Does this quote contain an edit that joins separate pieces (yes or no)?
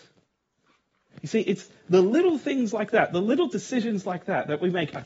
no